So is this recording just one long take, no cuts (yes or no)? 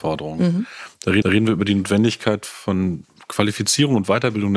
no